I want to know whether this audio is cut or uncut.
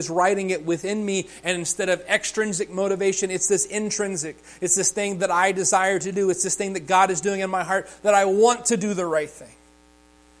uncut